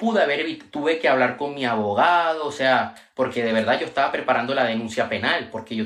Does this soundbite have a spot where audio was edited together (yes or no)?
no